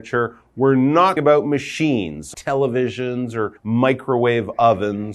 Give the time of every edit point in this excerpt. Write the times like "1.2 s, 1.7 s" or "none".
1.2 s, 2.3 s, 3.6 s

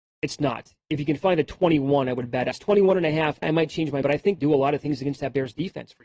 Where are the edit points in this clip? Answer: 2.5 s, 3.4 s, 4.0 s, 4.4 s

